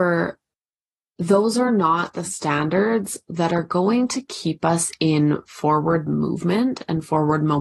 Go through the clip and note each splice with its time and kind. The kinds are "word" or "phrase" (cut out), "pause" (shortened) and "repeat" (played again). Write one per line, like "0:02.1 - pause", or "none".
none